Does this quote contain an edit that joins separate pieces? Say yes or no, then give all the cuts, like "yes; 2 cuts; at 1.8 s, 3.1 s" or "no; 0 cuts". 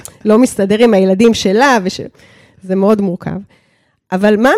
no; 0 cuts